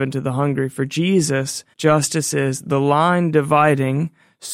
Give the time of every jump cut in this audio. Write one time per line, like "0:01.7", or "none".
0:01.7